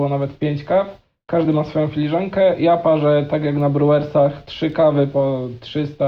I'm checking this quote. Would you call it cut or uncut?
uncut